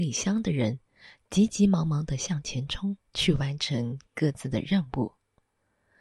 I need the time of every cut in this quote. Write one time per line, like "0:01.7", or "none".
0:03.1